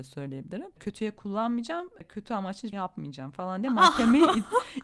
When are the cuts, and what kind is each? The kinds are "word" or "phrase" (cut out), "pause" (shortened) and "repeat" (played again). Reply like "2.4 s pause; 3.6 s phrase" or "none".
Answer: 2.7 s word